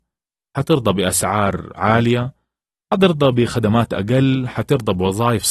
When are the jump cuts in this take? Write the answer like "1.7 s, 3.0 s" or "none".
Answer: none